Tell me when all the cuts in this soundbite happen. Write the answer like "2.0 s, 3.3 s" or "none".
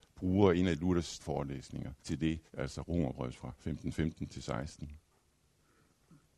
1.2 s, 2.0 s, 2.5 s, 3.4 s